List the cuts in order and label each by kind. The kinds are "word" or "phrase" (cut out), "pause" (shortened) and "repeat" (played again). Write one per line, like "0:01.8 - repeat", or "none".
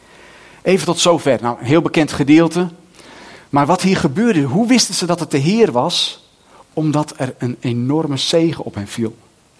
none